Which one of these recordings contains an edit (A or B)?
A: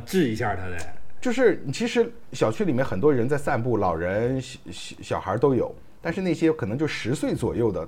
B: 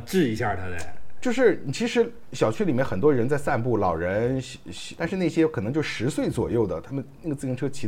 B